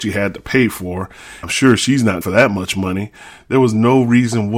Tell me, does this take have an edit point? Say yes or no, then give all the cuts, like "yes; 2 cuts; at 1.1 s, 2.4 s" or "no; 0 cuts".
yes; 2 cuts; at 1.4 s, 2.2 s